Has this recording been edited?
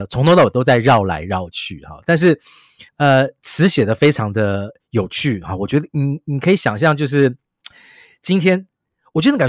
yes; 1 cut; at 2.9 s

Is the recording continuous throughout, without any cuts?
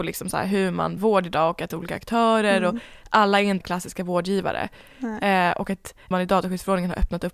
no; 4 cuts; at 1.0 s, 1.7 s, 3.6 s, 6.1 s

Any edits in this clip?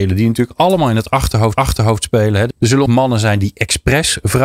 yes; 3 cuts; at 1.6 s, 2.5 s, 2.9 s

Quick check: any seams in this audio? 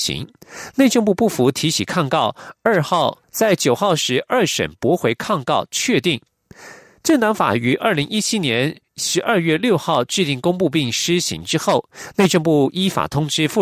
yes; 1 cut; at 3.2 s

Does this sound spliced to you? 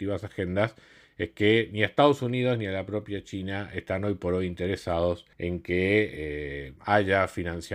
yes; 2 cuts; at 5.3 s, 6.8 s

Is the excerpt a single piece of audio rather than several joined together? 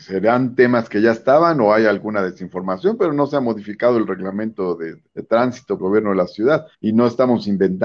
no; 3 cuts; at 5.1 s, 5.8 s, 6.7 s

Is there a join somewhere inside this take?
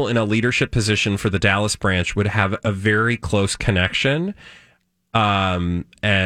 no; 0 cuts

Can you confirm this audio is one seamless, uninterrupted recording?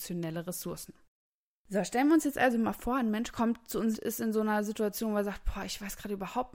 no; 2 cuts; at 1.3 s, 3.9 s

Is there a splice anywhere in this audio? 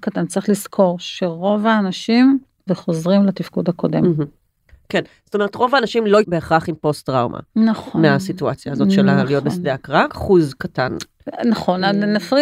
yes; 3 cuts; at 2.7 s, 6.2 s, 10.1 s

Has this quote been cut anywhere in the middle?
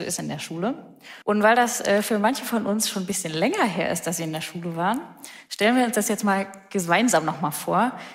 yes; 1 cut; at 1.2 s

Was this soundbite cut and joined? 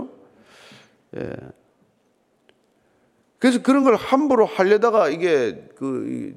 no; 0 cuts

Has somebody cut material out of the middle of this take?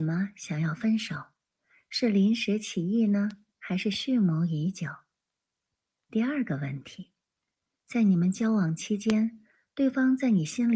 no; 0 cuts

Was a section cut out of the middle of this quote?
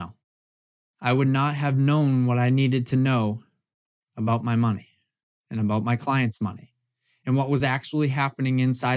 no; 0 cuts

